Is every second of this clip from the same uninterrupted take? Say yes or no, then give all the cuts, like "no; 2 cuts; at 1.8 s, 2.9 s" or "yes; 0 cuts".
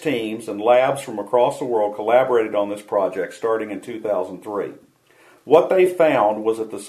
yes; 0 cuts